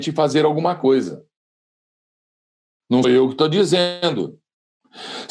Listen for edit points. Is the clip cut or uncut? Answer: cut